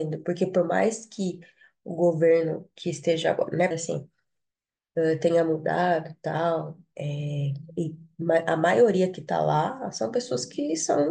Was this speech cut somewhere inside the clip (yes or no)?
yes